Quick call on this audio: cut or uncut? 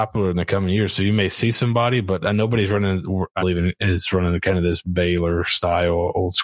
cut